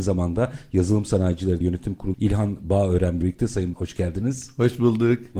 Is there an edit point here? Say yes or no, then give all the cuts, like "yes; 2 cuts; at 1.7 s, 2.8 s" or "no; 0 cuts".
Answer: yes; 4 cuts; at 1.6 s, 2.1 s, 3.2 s, 3.7 s